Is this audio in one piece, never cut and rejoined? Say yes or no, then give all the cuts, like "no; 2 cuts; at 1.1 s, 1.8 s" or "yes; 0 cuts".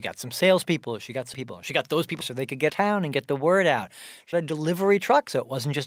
no; 4 cuts; at 1.3 s, 2.2 s, 2.7 s, 4.3 s